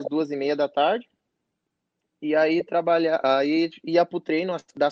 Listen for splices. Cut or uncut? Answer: uncut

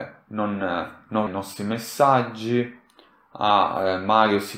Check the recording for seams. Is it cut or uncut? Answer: cut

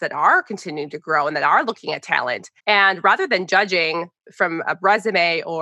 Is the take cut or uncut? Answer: cut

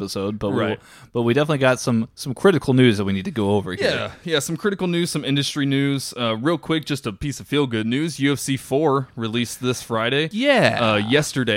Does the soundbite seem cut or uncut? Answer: uncut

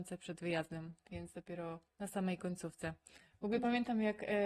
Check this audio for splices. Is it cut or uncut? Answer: cut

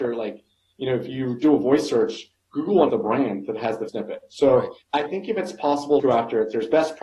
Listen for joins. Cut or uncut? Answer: cut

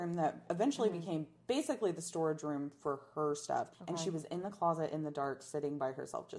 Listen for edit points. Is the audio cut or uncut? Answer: cut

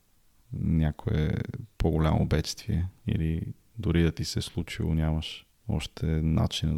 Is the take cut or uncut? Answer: cut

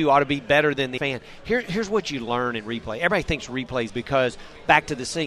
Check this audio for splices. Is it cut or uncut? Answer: cut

